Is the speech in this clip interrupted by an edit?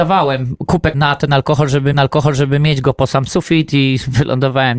yes; 2 cuts; at 0.9 s, 1.9 s

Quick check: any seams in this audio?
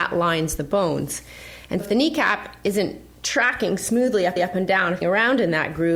yes; 3 cuts; at 1.8 s, 4.4 s, 5.0 s

